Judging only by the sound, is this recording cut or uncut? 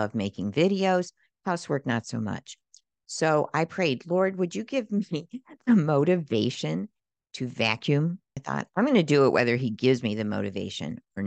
uncut